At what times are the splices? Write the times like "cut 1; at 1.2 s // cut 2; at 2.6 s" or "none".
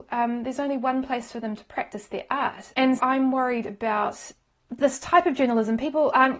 cut 1; at 3.0 s // cut 2; at 4.8 s